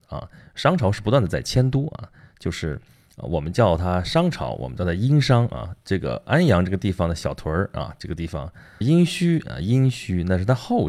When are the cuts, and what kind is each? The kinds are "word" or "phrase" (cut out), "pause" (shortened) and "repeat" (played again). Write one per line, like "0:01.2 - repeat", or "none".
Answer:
0:08.8 - word